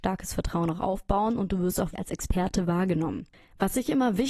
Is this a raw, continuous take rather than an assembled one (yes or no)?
no